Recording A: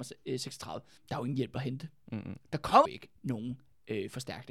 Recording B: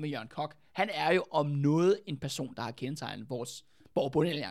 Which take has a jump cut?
A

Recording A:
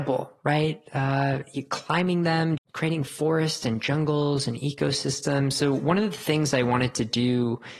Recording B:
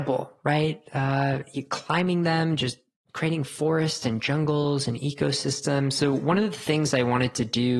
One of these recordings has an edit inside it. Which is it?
A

